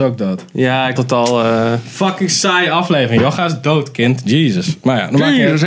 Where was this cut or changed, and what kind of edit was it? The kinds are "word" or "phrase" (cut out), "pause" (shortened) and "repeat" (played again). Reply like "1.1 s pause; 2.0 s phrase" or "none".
1.0 s word